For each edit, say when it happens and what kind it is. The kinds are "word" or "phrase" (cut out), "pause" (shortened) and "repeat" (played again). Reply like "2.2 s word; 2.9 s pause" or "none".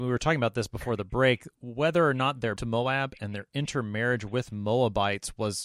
2.6 s word